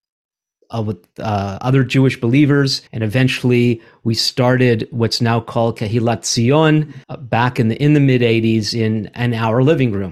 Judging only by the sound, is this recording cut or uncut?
cut